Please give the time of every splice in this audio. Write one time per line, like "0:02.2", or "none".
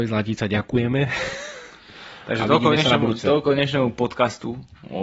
none